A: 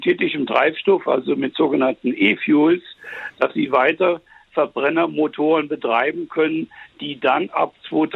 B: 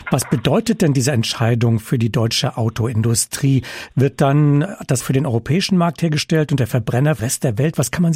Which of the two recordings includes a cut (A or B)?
B